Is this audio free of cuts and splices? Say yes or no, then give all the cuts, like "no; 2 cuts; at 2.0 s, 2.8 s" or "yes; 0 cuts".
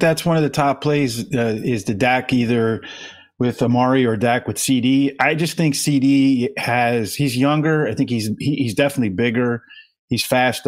yes; 0 cuts